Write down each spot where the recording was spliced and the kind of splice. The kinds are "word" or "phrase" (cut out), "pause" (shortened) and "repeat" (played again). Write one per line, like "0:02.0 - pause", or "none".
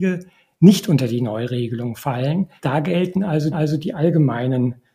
0:02.6 - pause
0:03.5 - repeat